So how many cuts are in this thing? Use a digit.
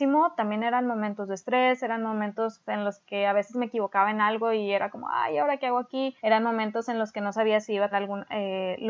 3